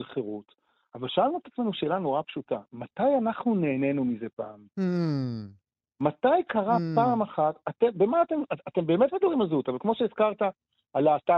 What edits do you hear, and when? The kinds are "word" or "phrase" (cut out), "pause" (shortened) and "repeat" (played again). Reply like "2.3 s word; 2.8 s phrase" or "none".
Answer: none